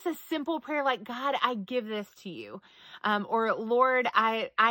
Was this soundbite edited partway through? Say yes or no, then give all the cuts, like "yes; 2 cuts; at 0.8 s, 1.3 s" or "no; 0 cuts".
no; 0 cuts